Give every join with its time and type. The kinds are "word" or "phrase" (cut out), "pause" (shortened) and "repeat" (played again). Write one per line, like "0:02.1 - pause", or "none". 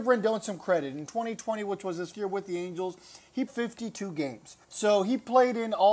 0:02.1 - word
0:03.5 - word
0:04.6 - pause